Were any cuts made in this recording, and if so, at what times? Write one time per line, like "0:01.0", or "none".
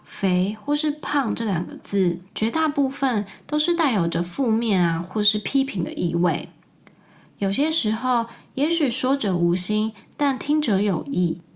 0:02.3

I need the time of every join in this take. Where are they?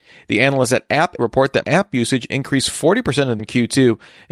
0:01.2
0:01.6
0:03.4

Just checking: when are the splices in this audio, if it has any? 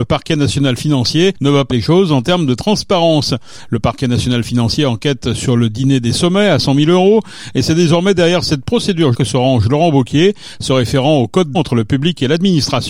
0:01.7
0:09.1
0:11.5

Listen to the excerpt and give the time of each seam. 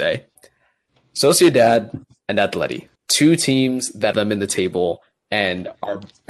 0:02.9
0:04.1

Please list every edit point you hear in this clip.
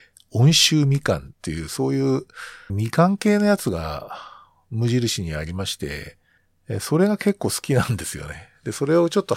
0:01.3
0:02.7
0:06.4

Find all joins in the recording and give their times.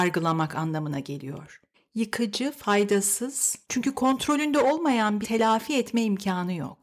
0:01.7
0:03.6
0:05.2

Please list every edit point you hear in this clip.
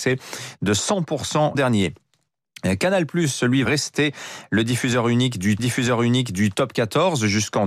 0:01.5
0:03.6
0:05.6

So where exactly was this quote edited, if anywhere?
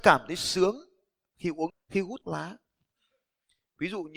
0:01.7
0:02.2

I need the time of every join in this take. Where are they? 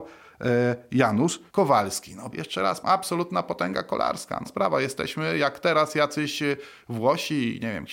0:01.5
0:02.3
0:02.8
0:04.4

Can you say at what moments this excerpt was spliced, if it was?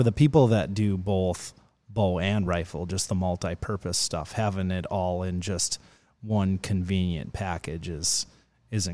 none

